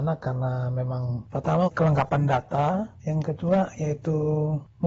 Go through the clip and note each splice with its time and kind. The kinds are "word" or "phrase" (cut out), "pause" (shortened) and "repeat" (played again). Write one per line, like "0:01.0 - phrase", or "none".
0:01.7 - word
0:03.0 - word